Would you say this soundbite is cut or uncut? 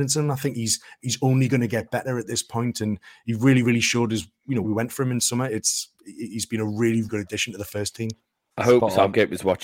cut